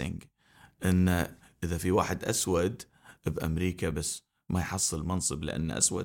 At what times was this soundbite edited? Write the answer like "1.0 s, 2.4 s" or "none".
none